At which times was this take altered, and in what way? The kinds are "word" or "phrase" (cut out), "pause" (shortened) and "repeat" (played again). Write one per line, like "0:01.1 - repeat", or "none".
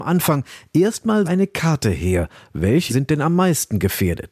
0:01.2 - word
0:02.9 - word